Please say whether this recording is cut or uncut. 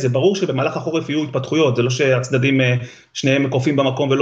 uncut